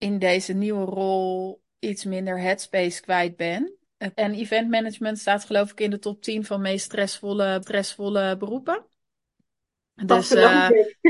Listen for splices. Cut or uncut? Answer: cut